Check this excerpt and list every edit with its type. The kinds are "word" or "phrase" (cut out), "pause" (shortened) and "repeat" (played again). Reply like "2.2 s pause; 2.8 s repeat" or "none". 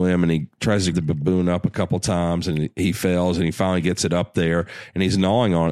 0.9 s word